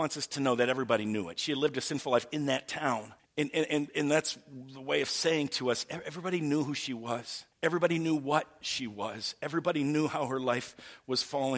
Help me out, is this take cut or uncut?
cut